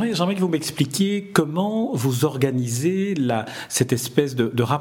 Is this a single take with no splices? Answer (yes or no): yes